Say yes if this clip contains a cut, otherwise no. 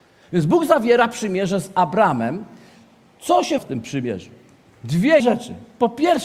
yes